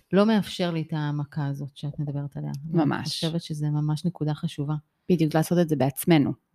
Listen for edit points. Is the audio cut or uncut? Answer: cut